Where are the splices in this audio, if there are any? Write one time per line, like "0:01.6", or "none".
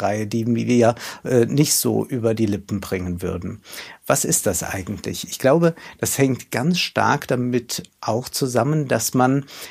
none